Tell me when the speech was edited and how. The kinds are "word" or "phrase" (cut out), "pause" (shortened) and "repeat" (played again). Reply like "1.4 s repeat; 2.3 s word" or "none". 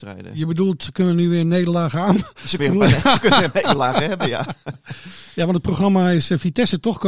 2.6 s word; 3.5 s word